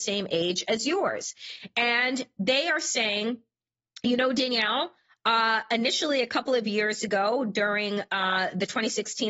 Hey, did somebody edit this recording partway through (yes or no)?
no